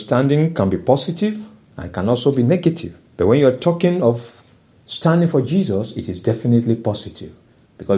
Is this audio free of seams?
no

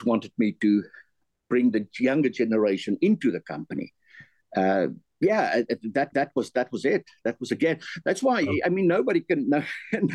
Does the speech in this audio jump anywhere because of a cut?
yes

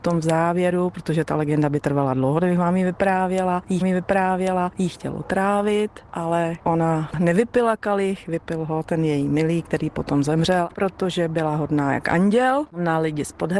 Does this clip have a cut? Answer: yes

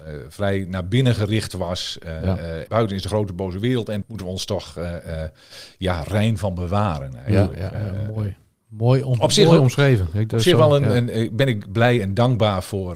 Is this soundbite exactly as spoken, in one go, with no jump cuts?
no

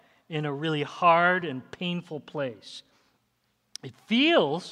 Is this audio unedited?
yes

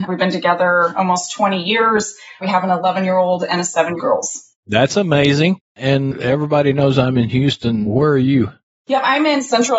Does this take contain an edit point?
yes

